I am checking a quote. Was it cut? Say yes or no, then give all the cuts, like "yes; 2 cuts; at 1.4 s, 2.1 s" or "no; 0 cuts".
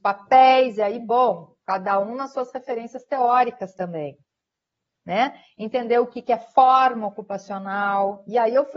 no; 0 cuts